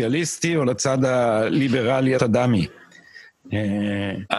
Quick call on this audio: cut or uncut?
cut